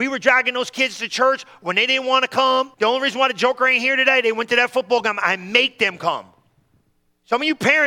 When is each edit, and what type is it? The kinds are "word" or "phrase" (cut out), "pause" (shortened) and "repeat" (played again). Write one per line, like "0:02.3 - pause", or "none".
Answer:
0:02.7 - pause